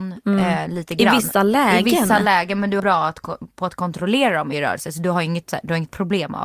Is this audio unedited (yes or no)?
no